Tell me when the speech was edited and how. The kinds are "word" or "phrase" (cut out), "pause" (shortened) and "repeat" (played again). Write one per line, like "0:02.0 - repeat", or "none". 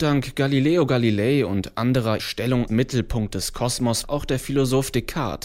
0:02.2 - word
0:02.7 - word
0:04.0 - phrase